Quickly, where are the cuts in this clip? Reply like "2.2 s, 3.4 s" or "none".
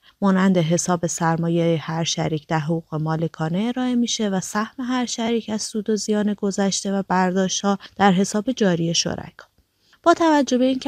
none